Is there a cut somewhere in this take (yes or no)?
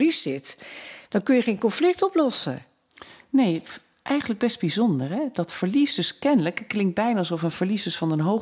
no